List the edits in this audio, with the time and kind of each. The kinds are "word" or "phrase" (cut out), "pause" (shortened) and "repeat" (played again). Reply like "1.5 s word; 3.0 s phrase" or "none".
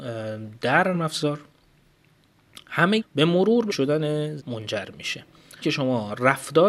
0.9 s word; 3.0 s word; 3.7 s word; 4.4 s word; 5.6 s word